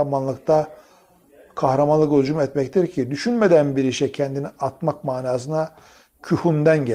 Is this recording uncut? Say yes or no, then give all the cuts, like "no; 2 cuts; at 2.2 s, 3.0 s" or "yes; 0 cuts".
yes; 0 cuts